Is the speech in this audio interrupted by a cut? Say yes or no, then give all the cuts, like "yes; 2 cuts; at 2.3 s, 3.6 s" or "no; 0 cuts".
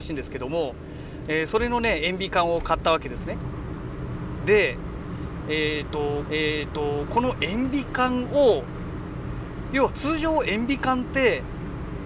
yes; 1 cut; at 6.3 s